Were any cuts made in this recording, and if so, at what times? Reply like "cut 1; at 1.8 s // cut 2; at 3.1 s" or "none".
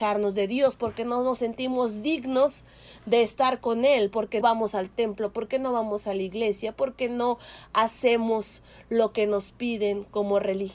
cut 1; at 4.4 s